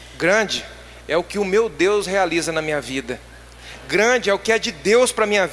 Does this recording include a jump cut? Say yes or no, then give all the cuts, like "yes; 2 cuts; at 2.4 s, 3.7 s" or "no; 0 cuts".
no; 0 cuts